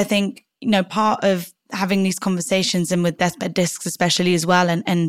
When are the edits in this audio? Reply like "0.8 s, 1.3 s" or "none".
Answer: none